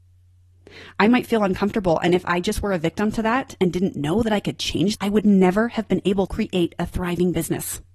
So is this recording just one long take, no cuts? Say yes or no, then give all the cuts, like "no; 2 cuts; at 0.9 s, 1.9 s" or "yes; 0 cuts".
no; 2 cuts; at 5.0 s, 6.3 s